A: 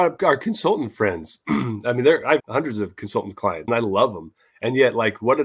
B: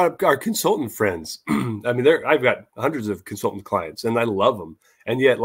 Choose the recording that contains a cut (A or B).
A